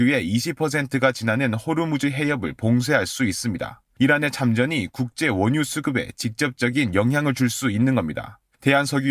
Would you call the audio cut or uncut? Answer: uncut